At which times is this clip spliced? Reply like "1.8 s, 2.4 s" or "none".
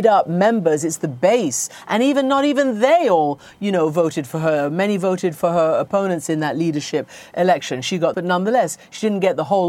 8.1 s